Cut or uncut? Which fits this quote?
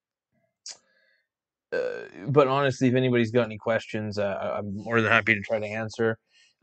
uncut